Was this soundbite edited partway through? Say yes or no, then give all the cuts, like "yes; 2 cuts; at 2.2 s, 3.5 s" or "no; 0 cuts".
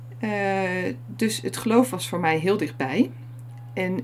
no; 0 cuts